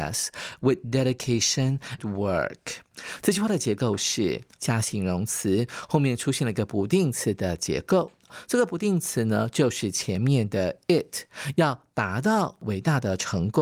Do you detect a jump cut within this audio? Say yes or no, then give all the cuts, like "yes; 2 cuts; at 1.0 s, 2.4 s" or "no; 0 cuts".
yes; 2 cuts; at 2.0 s, 4.6 s